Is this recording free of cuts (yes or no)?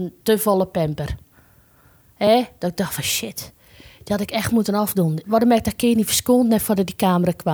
yes